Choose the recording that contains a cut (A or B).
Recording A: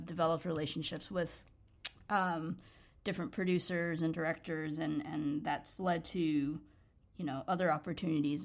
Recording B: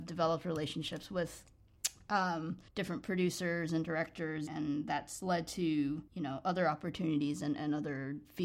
B